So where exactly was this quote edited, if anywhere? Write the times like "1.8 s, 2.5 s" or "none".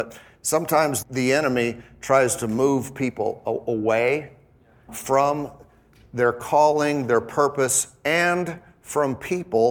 1.0 s, 4.9 s

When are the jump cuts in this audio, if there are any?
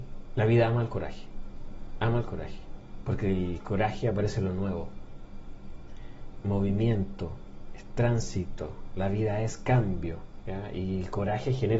6.4 s

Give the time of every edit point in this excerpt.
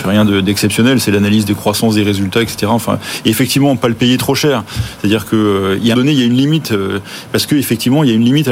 5.9 s

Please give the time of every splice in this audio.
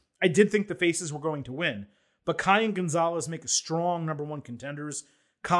none

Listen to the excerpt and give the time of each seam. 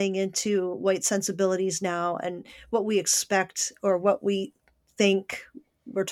none

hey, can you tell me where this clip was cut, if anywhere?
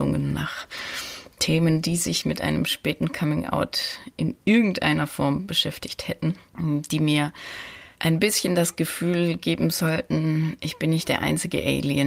6.5 s, 7.9 s

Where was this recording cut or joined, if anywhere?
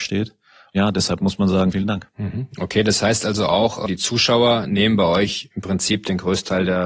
1.7 s, 3.9 s

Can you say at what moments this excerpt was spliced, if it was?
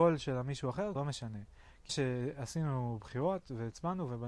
1.0 s, 1.9 s

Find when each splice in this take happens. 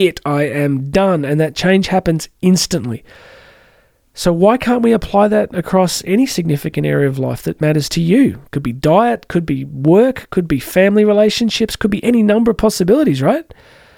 none

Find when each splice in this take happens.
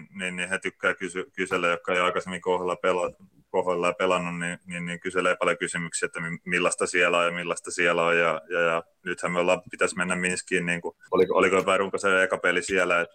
none

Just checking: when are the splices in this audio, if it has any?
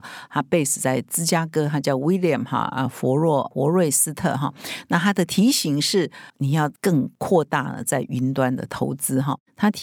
6.3 s

